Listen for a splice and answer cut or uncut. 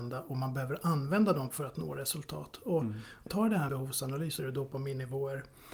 cut